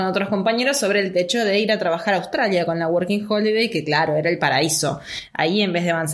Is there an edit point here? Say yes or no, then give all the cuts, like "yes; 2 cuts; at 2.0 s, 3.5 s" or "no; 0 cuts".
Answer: no; 0 cuts